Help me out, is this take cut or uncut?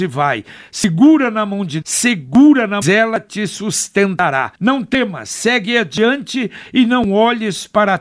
cut